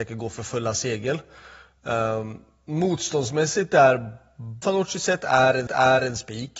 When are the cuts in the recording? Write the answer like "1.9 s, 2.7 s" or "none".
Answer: 4.6 s, 5.7 s